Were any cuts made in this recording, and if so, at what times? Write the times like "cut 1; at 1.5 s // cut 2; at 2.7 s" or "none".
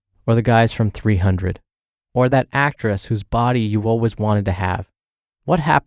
none